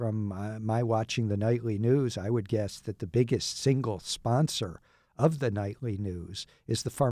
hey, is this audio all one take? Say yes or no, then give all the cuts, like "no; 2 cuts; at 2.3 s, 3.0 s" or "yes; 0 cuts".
yes; 0 cuts